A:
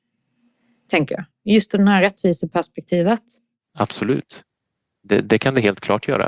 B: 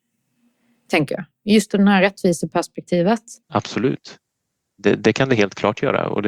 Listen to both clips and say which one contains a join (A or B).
B